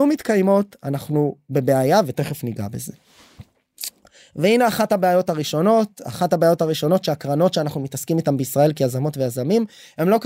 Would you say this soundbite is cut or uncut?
uncut